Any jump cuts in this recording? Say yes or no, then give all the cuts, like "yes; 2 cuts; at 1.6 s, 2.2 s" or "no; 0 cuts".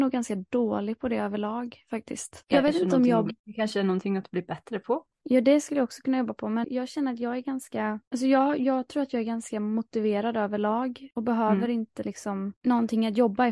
yes; 2 cuts; at 5.1 s, 6.6 s